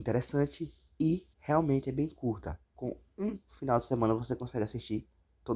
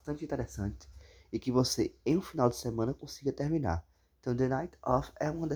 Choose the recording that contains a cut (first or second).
first